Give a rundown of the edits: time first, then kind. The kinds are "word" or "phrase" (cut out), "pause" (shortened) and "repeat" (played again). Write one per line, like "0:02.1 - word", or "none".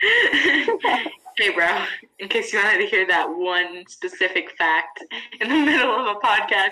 none